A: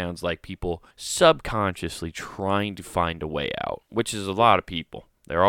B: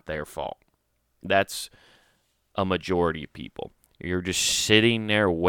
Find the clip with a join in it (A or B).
A